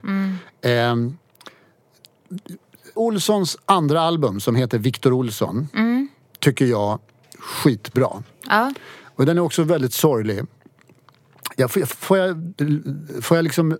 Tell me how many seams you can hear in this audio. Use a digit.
3